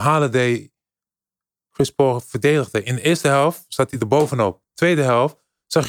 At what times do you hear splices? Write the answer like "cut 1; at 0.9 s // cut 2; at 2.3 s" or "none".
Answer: none